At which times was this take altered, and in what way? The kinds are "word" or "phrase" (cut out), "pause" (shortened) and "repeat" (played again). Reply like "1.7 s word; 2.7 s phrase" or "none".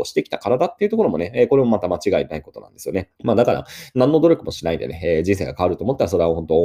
3.1 s pause